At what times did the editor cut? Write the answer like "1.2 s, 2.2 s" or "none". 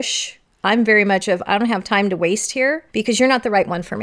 2.9 s